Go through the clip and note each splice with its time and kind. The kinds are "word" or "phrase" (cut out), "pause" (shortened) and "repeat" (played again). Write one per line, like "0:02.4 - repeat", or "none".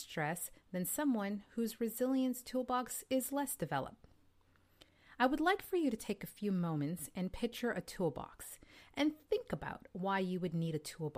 none